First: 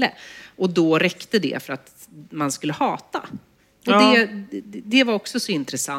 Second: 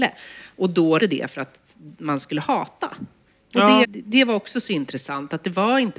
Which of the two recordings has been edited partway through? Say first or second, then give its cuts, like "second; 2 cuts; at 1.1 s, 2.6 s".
second; 2 cuts; at 1.0 s, 3.8 s